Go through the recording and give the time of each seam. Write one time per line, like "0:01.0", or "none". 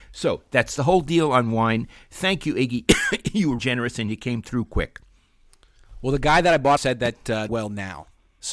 0:03.6
0:06.8
0:07.5